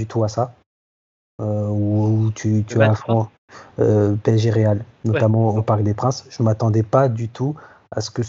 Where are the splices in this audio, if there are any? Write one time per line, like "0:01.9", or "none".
0:04.9

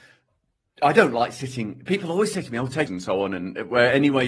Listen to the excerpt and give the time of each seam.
0:02.9

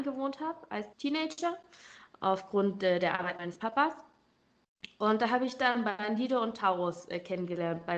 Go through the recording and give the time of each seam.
0:00.9

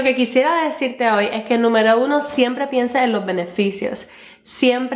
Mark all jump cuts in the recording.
none

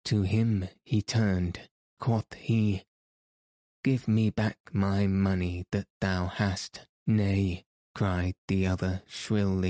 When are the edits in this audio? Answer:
0:02.0
0:06.9

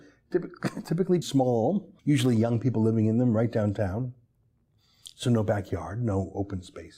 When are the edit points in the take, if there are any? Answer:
0:01.2
0:02.0

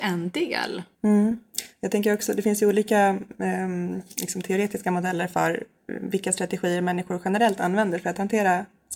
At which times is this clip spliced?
0:00.9

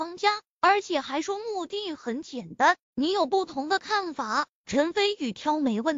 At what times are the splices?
0:02.8

